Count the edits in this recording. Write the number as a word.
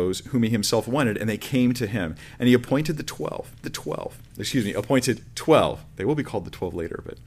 one